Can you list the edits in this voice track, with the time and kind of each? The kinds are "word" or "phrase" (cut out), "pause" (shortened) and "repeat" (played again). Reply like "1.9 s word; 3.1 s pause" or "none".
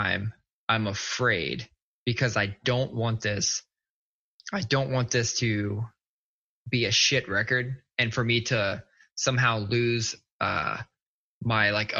none